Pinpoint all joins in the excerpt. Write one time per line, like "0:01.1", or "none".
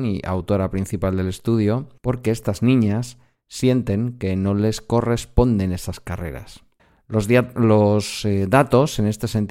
0:02.0
0:06.8